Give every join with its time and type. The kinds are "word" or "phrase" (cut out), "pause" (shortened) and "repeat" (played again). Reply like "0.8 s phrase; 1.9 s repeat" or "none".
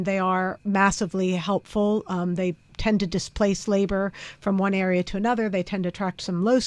none